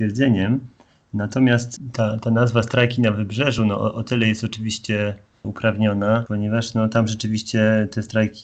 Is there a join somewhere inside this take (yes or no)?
no